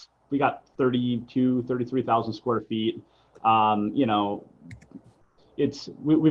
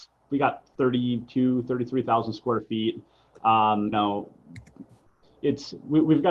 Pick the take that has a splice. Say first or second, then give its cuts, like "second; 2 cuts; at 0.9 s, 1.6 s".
second; 1 cut; at 3.9 s